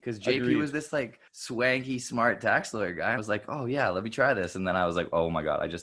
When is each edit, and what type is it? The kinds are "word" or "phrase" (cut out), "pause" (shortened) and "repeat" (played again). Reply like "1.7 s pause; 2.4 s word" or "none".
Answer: 1.3 s pause; 3.2 s word